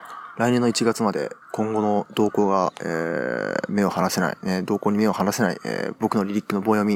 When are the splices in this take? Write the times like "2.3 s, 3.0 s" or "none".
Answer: 1.4 s